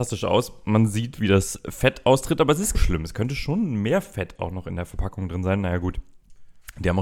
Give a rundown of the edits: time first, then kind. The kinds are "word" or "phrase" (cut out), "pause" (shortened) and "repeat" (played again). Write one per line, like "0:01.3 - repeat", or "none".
0:02.7 - phrase